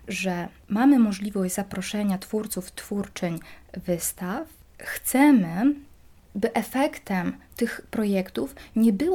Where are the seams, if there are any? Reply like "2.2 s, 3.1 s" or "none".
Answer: none